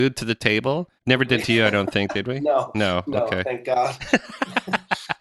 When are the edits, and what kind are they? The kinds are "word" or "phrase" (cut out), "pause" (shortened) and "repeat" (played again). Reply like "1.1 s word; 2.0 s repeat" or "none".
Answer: 1.0 s pause; 1.4 s word